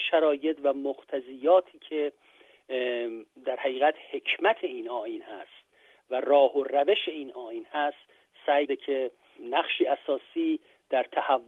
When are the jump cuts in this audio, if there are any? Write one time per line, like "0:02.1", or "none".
0:08.7